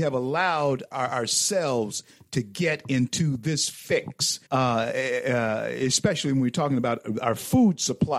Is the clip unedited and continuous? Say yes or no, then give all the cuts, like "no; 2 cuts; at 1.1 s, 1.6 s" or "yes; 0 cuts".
no; 2 cuts; at 0.9 s, 4.5 s